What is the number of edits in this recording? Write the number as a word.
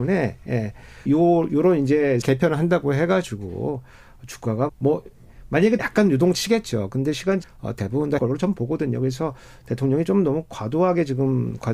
six